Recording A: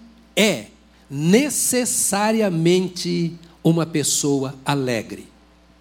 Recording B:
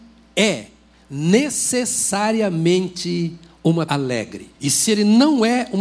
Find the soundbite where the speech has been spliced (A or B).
B